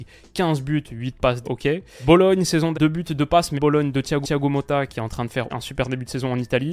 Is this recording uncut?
no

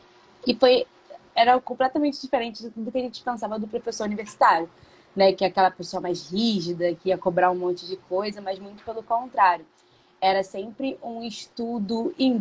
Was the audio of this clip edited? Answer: no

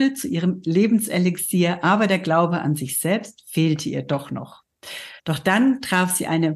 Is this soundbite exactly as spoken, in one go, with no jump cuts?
no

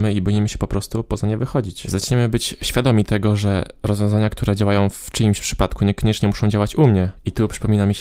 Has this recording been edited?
no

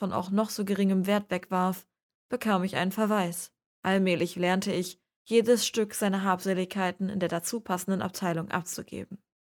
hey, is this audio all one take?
no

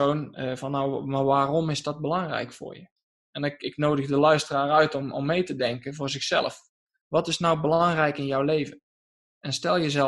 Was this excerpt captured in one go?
yes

